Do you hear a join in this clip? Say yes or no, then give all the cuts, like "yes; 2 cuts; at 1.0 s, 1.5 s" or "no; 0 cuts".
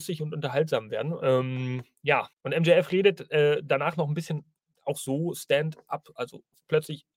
yes; 1 cut; at 2.3 s